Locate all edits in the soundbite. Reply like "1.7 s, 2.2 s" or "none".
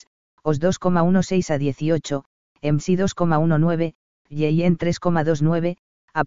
none